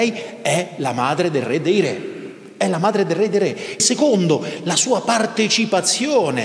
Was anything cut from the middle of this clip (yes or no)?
yes